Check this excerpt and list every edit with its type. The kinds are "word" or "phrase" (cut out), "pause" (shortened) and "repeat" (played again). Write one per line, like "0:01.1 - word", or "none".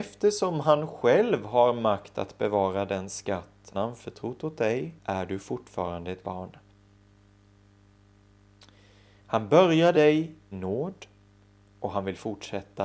0:03.7 - word
0:05.0 - pause
0:06.2 - word
0:09.9 - word
0:10.5 - word